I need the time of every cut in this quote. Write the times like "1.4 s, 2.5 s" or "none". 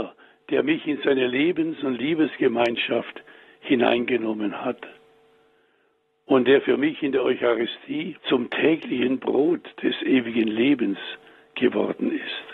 8.2 s